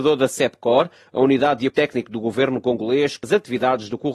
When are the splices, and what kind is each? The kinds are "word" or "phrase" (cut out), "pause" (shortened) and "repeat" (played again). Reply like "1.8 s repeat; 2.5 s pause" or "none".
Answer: 1.7 s word; 3.2 s word